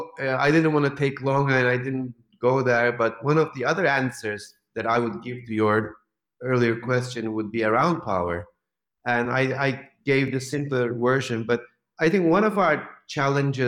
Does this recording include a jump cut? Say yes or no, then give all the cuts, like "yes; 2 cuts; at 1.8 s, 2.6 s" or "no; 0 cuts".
no; 0 cuts